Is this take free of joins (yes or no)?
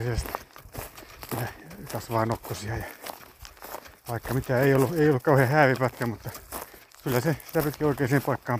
yes